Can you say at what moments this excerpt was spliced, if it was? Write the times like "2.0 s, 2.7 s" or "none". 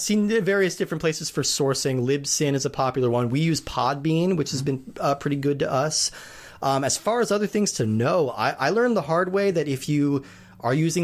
none